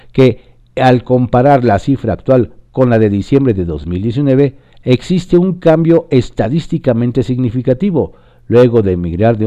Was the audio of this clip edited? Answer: no; 0 cuts

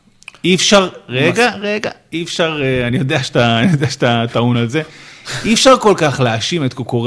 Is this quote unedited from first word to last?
yes; 0 cuts

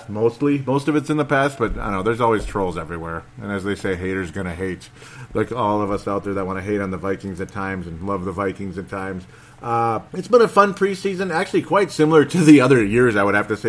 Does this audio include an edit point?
yes; 1 cut; at 10.1 s

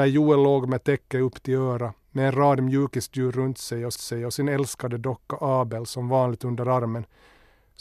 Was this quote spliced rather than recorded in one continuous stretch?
yes; 2 cuts; at 2.0 s, 4.0 s

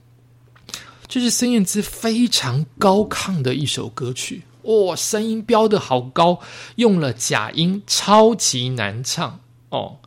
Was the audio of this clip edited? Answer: no; 0 cuts

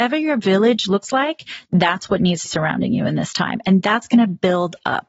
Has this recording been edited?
yes; 1 cut; at 2.5 s

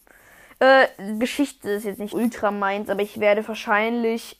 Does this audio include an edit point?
yes; 2 cuts; at 1.2 s, 2.1 s

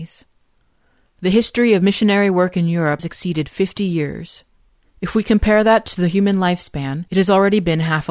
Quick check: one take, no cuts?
no; 2 cuts; at 3.0 s, 7.1 s

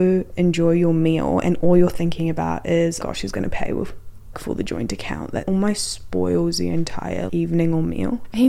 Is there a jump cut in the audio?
yes; 4 cuts; at 3.0 s, 4.3 s, 5.4 s, 7.3 s

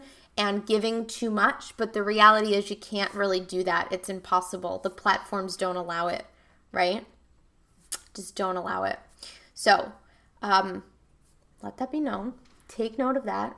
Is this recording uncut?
yes; 0 cuts

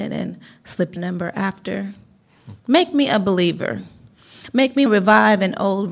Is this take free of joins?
no; 3 cuts; at 1.0 s, 2.6 s, 4.9 s

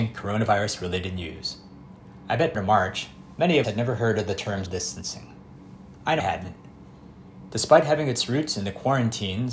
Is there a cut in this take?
yes; 4 cuts; at 2.5 s, 3.6 s, 4.7 s, 6.2 s

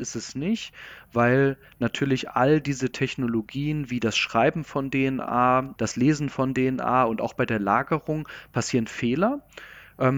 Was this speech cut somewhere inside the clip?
yes; 1 cut; at 5.8 s

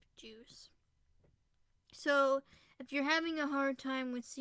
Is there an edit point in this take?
no; 0 cuts

